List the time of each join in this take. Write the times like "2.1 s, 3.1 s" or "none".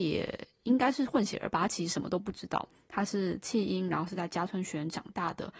none